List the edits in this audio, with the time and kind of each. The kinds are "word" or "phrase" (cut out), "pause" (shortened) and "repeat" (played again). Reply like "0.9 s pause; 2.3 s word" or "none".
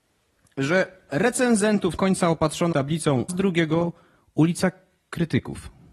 1.1 s word; 2.0 s phrase; 2.7 s word; 3.3 s phrase